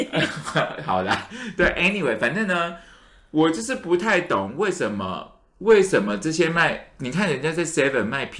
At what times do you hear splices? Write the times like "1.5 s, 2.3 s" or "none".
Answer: none